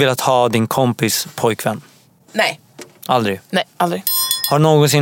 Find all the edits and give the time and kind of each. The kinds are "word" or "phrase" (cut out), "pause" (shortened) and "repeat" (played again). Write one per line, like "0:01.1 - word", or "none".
0:02.1 - pause